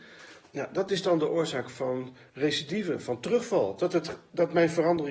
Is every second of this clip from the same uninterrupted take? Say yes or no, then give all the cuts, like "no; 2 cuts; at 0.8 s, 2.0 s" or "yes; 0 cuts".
yes; 0 cuts